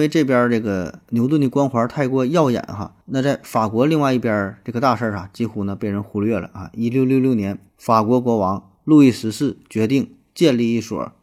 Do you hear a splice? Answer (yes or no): yes